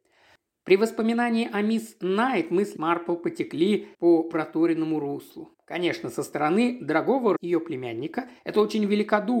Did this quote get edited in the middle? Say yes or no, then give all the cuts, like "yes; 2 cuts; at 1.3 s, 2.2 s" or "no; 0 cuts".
yes; 5 cuts; at 2.8 s, 3.9 s, 5.5 s, 7.4 s, 8.4 s